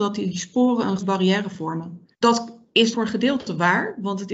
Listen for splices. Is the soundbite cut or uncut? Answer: cut